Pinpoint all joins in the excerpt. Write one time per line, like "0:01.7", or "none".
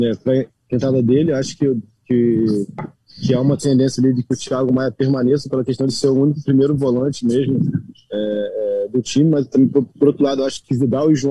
none